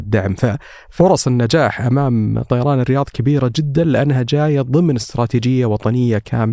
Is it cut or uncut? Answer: uncut